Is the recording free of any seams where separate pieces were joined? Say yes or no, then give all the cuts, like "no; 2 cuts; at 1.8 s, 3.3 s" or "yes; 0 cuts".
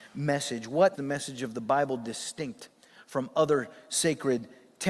no; 1 cut; at 0.9 s